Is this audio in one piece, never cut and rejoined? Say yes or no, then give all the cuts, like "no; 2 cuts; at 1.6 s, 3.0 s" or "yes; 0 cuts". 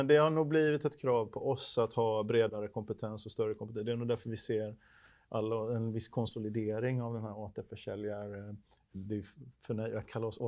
yes; 0 cuts